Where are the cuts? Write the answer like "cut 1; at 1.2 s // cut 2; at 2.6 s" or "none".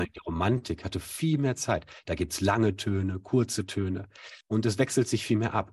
cut 1; at 4.4 s